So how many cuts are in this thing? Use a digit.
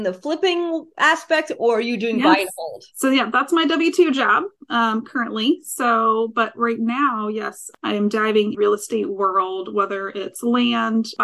1